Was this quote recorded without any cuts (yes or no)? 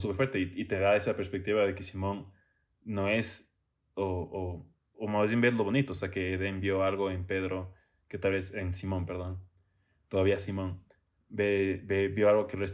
yes